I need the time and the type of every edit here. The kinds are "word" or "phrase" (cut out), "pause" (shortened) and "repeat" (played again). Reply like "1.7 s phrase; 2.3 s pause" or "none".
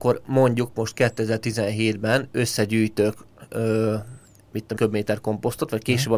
4.8 s phrase